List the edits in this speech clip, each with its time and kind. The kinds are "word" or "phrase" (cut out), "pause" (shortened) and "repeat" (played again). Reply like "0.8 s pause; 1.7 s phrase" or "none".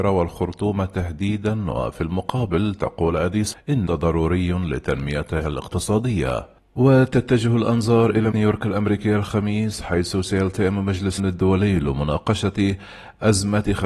3.5 s word; 3.9 s word; 8.3 s word; 11.2 s word